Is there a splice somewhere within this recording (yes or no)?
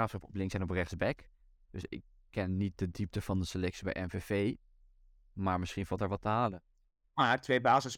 no